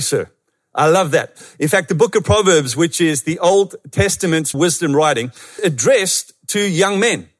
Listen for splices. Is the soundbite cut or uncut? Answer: cut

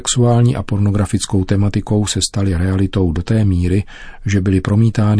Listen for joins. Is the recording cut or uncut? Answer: uncut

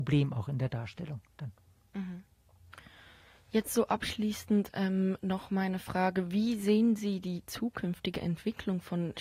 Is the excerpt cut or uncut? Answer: uncut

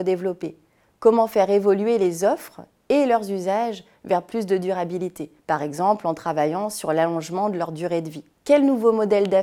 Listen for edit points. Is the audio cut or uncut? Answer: cut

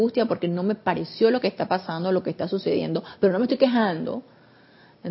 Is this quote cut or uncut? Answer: uncut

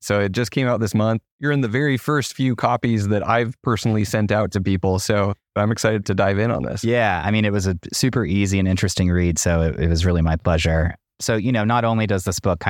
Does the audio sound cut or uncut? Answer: cut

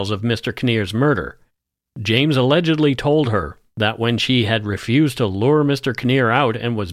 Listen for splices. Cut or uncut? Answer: uncut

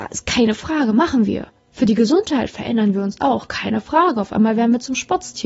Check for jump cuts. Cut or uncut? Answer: cut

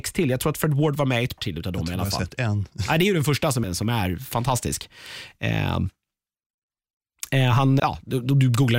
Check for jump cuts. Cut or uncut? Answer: cut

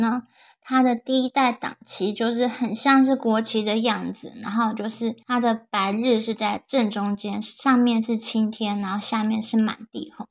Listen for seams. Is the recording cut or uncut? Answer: cut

